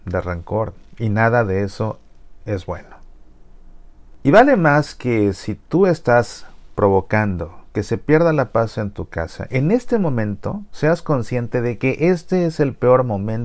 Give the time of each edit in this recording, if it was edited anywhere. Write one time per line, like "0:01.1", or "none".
none

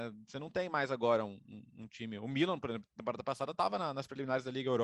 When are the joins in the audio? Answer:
none

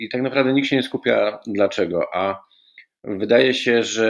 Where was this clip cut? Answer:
none

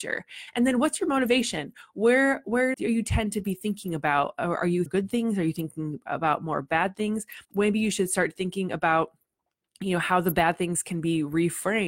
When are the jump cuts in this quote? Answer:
0:02.7
0:04.9
0:07.4

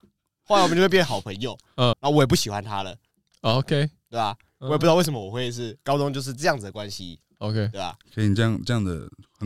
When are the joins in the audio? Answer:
0:01.9

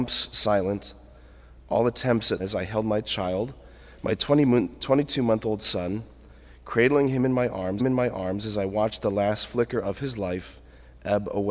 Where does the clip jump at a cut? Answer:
0:02.4
0:07.8

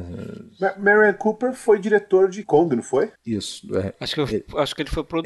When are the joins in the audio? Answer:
0:02.4
0:03.2

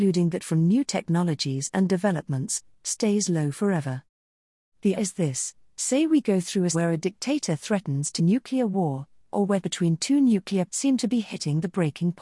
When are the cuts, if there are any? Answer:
0:05.0
0:06.7
0:08.2
0:09.6
0:10.7

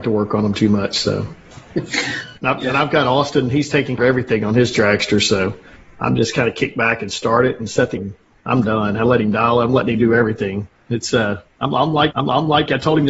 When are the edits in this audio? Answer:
0:02.4
0:04.0
0:08.0
0:12.1

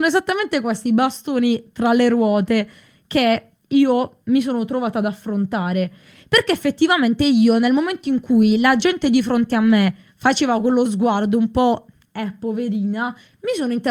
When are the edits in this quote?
none

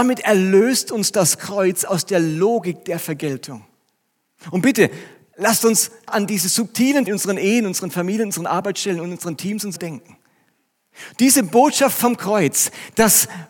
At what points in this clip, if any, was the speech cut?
0:06.1
0:07.1
0:09.8

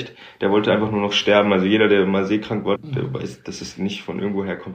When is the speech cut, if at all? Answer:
0:02.8

